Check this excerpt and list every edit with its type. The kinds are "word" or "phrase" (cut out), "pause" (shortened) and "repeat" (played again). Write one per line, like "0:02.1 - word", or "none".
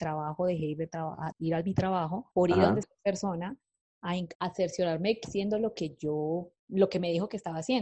0:01.3 - word
0:02.3 - pause
0:02.8 - word
0:04.3 - word
0:05.2 - word
0:06.6 - pause

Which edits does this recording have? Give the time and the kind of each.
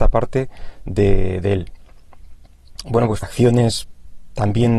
0:02.8 - pause
0:03.2 - phrase

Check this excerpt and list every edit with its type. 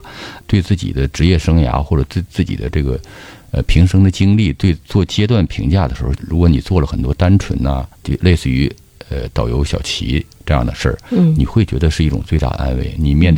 0:04.8 - pause
0:06.1 - phrase
0:07.9 - pause

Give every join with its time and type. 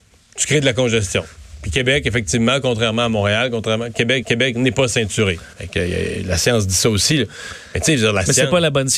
0:04.2 - repeat
0:05.5 - pause

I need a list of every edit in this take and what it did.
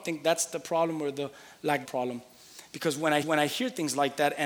0:01.8 - phrase
0:03.2 - repeat

